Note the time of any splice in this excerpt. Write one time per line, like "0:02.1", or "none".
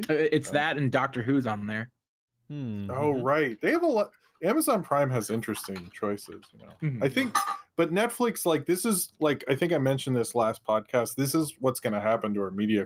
none